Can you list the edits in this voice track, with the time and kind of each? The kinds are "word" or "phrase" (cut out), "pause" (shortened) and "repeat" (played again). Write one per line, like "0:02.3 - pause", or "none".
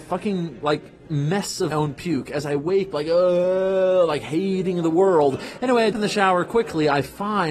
0:01.1 - word
0:01.7 - word
0:02.9 - word
0:05.9 - word